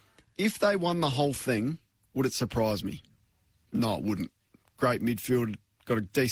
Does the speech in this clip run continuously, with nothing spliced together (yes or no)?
yes